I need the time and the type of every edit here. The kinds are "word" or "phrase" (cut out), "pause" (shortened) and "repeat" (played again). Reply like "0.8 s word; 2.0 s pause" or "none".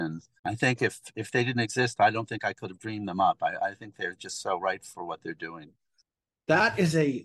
none